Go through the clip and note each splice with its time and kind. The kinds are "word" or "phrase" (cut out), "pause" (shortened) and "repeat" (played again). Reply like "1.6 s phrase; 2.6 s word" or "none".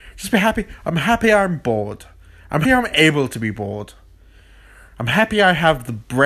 2.6 s word